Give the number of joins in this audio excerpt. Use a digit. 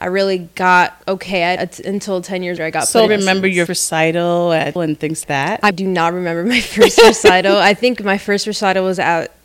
8